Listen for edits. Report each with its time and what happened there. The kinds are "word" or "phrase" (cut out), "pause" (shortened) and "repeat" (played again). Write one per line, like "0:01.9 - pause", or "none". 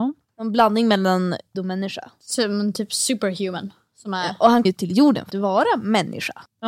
0:01.5 - word
0:04.6 - word
0:05.3 - word